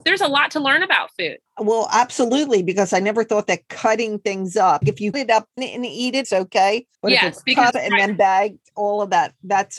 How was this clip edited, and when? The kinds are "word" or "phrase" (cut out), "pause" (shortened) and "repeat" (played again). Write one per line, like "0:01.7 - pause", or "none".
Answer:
0:01.5 - pause
0:04.8 - word
0:05.1 - word
0:05.6 - word
0:06.2 - word
0:06.9 - pause
0:07.7 - phrase